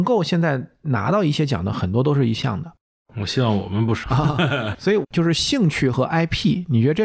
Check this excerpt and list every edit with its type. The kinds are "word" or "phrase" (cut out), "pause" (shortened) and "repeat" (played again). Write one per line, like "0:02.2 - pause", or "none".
0:02.4 - word
0:04.0 - word
0:04.7 - word